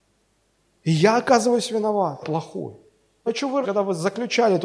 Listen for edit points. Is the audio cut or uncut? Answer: cut